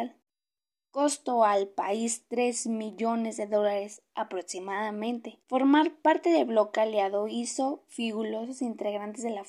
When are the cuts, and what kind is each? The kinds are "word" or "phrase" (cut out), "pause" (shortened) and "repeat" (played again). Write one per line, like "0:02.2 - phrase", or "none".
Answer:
0:05.4 - pause